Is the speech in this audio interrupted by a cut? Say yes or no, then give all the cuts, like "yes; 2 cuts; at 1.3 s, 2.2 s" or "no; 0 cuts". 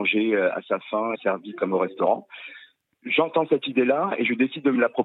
yes; 1 cut; at 1.1 s